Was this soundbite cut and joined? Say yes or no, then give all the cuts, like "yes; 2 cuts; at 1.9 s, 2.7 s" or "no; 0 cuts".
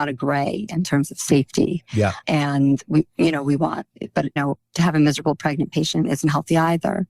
yes; 2 cuts; at 2.2 s, 4.4 s